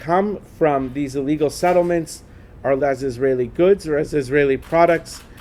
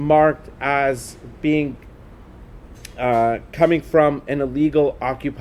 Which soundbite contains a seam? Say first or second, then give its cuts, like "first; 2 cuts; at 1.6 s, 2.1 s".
first; 1 cut; at 2.8 s